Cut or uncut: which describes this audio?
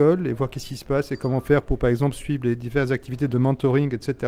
uncut